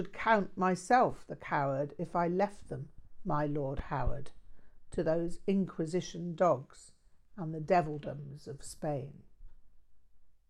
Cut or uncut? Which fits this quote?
uncut